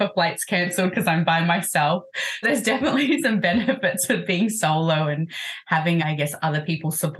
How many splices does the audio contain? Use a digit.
2